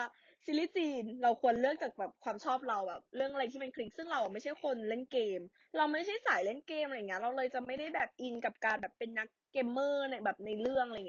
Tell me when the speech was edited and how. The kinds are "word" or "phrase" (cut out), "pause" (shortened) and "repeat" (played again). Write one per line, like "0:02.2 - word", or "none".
0:03.1 - pause